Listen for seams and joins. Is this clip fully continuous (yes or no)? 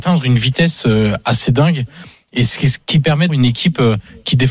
no